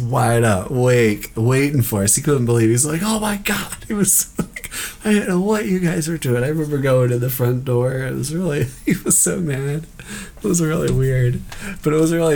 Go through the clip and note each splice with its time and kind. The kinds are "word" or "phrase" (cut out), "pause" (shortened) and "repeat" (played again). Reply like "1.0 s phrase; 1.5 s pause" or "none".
none